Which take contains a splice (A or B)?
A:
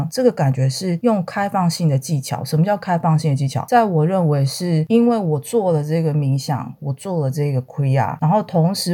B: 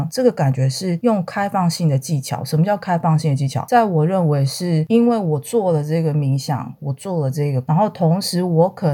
B